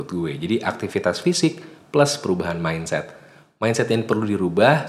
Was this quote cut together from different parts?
no; 0 cuts

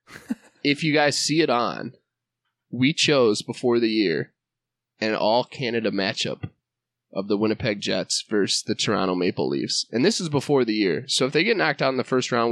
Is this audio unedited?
yes; 0 cuts

